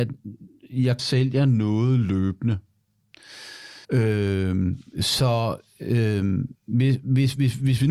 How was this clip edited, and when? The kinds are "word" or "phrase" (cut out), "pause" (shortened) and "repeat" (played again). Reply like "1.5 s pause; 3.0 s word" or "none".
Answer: 1.0 s phrase; 3.8 s pause; 6.6 s pause